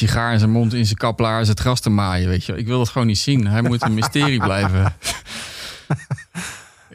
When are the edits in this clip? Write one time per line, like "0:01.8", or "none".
none